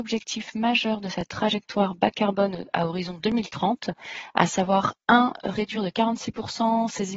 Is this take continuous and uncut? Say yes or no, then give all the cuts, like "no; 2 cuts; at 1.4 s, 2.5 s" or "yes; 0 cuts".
yes; 0 cuts